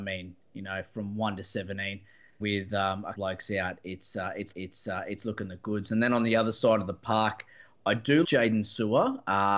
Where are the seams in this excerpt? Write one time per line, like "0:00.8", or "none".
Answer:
0:02.4
0:03.2
0:04.5
0:08.2